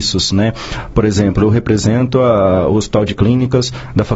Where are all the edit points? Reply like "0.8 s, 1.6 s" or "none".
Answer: none